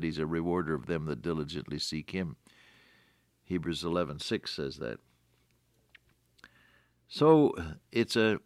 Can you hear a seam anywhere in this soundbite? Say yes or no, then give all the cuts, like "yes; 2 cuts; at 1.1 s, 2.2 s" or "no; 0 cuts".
no; 0 cuts